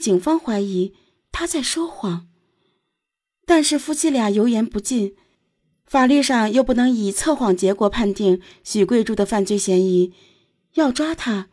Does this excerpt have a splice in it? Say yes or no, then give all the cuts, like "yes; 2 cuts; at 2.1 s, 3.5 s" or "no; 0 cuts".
no; 0 cuts